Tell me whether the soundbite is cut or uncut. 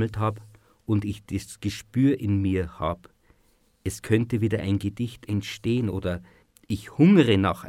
uncut